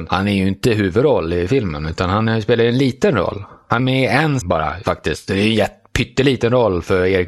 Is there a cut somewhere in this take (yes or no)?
yes